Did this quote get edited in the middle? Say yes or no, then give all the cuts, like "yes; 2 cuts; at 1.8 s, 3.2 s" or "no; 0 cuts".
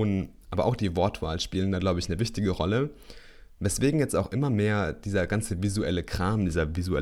no; 0 cuts